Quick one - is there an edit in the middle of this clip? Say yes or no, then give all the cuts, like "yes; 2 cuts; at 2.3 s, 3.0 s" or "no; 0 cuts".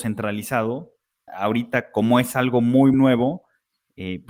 yes; 2 cuts; at 1.3 s, 2.9 s